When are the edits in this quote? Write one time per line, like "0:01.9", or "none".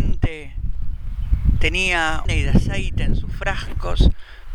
0:02.2